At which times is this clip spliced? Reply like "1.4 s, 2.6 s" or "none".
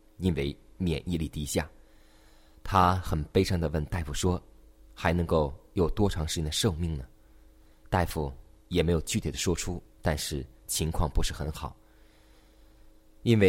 9.9 s